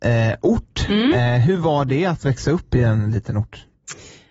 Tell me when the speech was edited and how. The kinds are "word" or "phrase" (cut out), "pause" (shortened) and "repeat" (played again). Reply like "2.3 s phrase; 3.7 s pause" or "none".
none